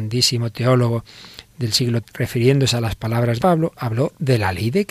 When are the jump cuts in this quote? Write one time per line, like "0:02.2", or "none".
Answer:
0:02.0
0:03.4